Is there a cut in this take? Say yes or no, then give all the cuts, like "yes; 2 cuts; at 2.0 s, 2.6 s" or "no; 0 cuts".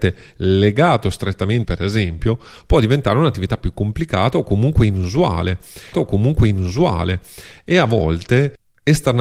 yes; 2 cuts; at 1.6 s, 5.9 s